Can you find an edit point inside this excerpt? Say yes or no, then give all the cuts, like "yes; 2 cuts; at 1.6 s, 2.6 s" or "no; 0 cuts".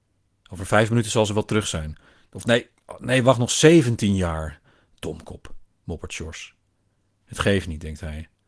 no; 0 cuts